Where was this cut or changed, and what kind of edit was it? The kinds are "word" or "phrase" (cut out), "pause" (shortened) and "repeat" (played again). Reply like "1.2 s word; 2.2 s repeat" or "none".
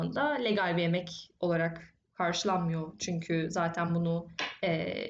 none